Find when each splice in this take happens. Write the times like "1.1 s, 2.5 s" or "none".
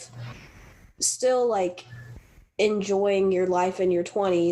none